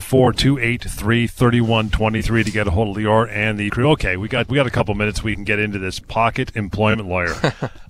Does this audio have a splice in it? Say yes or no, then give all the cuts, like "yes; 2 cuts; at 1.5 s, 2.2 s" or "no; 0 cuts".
yes; 2 cuts; at 3.7 s, 4.5 s